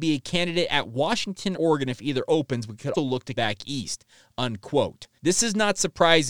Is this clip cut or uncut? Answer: cut